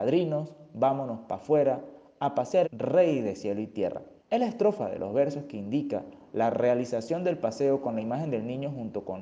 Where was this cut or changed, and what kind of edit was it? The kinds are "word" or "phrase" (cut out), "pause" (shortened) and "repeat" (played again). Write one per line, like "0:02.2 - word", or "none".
0:02.6 - phrase
0:04.2 - pause